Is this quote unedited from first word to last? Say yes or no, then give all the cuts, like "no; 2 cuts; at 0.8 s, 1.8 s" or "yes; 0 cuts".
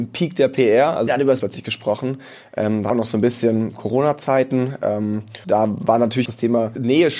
no; 5 cuts; at 1.1 s, 1.4 s, 2.9 s, 5.4 s, 6.3 s